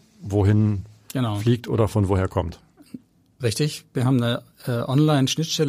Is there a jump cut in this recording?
no; 0 cuts

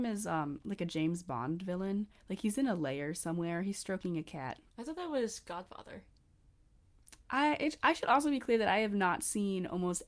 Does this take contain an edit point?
yes; 2 cuts; at 4.7 s, 7.2 s

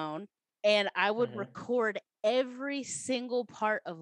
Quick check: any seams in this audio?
no; 0 cuts

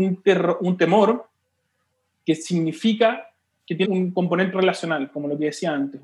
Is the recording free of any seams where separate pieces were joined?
no; 3 cuts; at 3.5 s, 3.8 s, 4.5 s

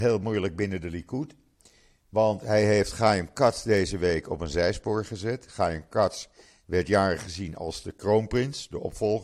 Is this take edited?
no; 0 cuts

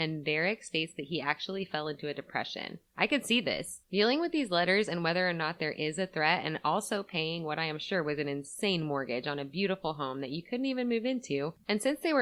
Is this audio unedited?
no; 2 cuts; at 2.9 s, 3.8 s

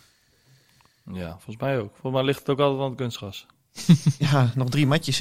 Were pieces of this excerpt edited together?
no; 0 cuts

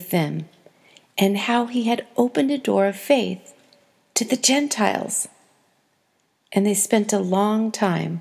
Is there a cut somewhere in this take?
no; 0 cuts

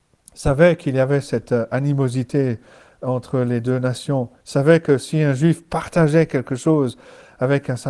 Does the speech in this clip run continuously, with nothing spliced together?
yes; 0 cuts

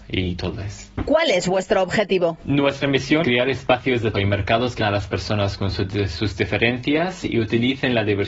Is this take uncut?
no; 3 cuts; at 3.2 s, 4.1 s, 4.8 s

